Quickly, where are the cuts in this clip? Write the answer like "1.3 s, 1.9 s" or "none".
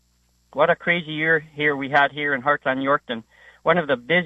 none